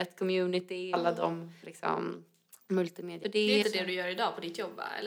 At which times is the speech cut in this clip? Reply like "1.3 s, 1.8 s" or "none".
0.9 s, 1.6 s, 3.2 s, 3.6 s

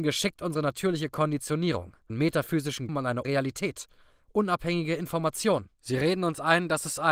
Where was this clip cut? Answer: 2.1 s, 2.9 s, 3.2 s, 5.7 s

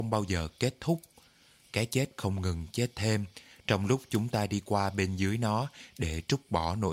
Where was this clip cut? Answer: none

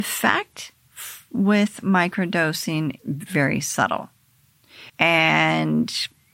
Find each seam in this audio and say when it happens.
3.0 s, 4.9 s

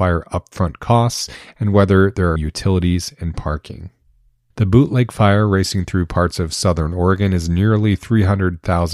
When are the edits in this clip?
2.4 s

